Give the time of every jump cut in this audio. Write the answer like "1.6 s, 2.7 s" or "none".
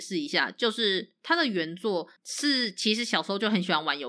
2.2 s